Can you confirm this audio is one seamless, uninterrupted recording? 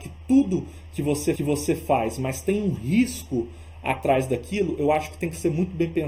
no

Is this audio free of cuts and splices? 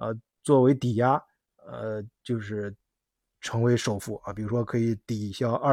yes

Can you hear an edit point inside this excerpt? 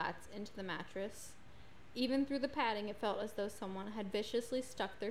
no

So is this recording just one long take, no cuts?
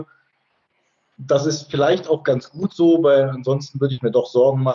yes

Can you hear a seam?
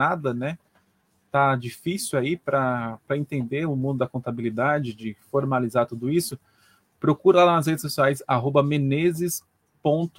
no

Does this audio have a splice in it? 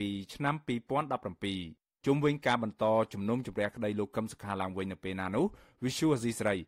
yes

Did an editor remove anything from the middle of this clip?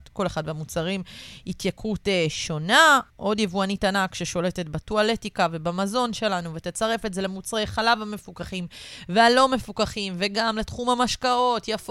yes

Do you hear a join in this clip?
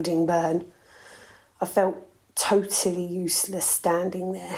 no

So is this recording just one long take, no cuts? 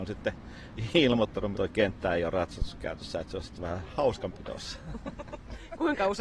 no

